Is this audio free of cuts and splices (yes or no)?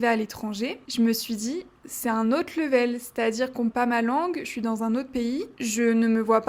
no